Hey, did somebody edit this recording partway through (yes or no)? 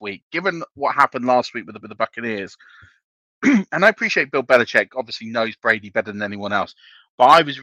yes